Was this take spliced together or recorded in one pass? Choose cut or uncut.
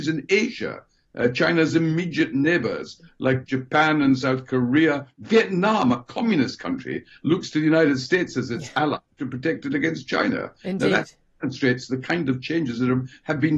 uncut